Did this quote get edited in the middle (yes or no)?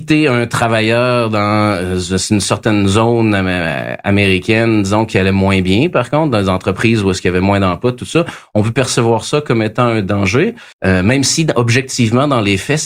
yes